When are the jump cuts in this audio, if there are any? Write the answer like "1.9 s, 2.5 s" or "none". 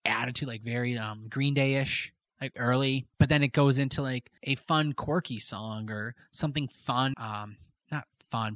2.5 s, 3.1 s, 4.4 s, 7.1 s